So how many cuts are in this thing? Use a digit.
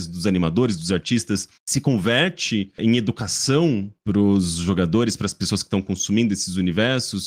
1